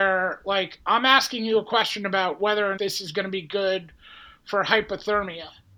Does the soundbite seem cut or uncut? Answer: cut